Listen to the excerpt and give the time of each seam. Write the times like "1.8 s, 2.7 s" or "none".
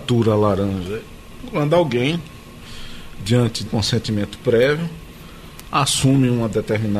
3.7 s